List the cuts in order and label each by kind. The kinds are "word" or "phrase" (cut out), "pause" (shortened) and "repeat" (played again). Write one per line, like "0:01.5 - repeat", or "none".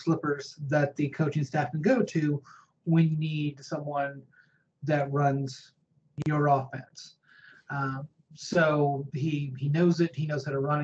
0:03.1 - word

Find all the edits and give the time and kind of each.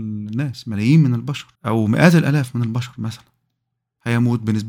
0:01.5 - pause

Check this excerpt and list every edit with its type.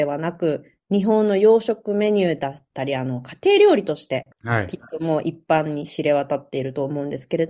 0:04.3 - pause

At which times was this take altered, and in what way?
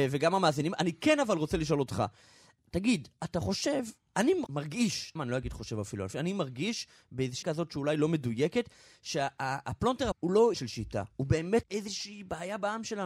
0:04.5 - word
0:05.2 - word
0:07.4 - word
0:10.1 - word
0:10.5 - word
0:11.6 - word

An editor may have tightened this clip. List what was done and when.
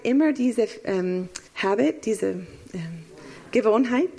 0:01.5 - pause

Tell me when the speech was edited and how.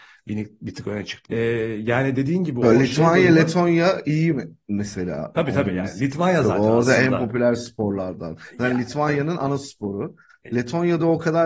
0:01.3 - word

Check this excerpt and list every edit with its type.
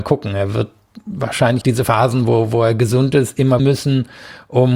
0:01.6 - word
0:03.6 - phrase

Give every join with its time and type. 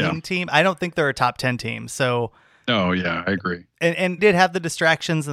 0:04.2 - word

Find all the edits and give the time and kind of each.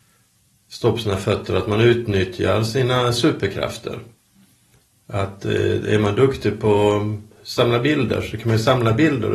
none

